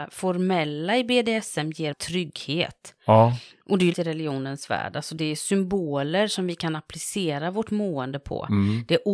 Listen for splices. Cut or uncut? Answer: cut